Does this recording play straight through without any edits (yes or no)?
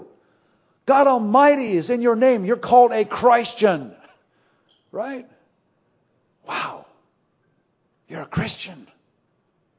yes